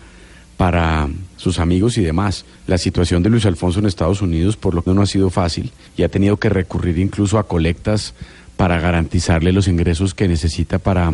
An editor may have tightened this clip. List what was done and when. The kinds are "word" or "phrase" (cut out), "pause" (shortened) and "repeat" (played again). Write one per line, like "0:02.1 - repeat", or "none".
0:02.5 - pause
0:04.9 - word
0:05.9 - pause